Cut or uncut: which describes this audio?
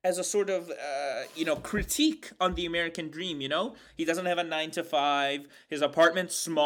uncut